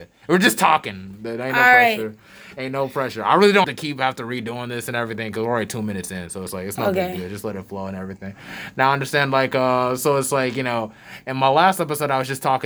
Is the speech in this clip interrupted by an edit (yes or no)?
yes